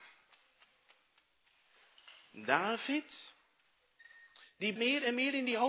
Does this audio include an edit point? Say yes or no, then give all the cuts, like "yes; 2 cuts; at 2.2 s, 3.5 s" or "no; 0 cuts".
yes; 1 cut; at 4.8 s